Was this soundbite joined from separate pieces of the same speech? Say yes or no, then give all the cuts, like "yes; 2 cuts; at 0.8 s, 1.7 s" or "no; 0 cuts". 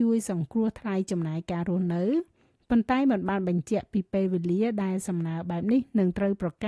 no; 0 cuts